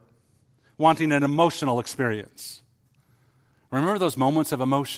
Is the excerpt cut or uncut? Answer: uncut